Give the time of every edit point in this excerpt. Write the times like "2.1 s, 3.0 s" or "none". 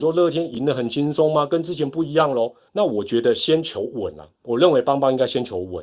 2.7 s